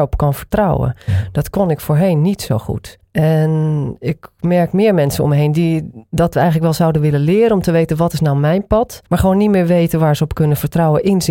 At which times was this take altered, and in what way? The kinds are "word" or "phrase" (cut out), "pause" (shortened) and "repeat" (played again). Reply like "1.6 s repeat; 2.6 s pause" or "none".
3.0 s pause; 9.1 s pause